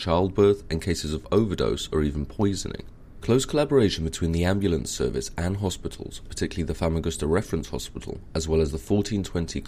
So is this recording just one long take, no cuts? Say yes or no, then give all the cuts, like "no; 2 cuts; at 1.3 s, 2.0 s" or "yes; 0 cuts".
yes; 0 cuts